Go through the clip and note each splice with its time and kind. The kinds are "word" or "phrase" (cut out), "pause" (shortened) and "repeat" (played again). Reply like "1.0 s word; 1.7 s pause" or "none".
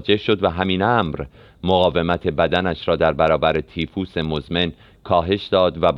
none